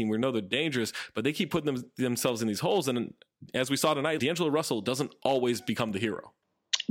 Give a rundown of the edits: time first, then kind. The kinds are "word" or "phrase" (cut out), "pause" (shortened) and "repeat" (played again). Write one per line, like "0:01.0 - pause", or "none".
0:04.2 - word